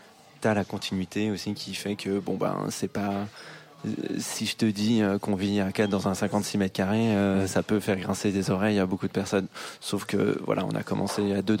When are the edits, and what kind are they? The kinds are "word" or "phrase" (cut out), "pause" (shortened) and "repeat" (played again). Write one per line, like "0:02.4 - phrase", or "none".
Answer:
none